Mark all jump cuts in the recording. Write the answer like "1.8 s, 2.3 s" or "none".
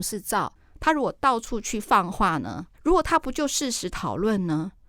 2.7 s